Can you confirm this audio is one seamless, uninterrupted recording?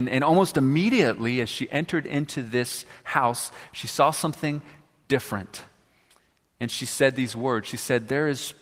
yes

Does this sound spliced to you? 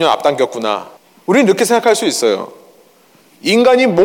yes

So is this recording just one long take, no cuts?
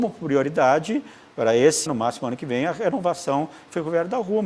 no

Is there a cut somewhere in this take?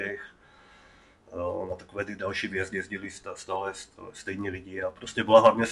no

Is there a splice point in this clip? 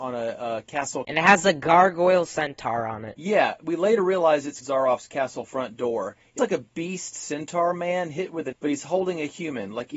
yes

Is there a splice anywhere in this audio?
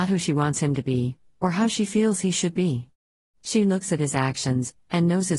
no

